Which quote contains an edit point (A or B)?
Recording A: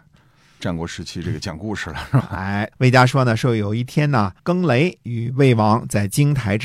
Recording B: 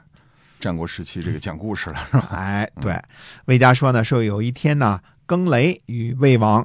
A